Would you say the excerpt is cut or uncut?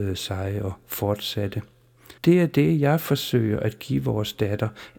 cut